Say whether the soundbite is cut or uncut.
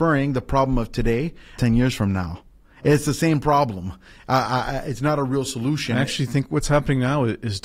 cut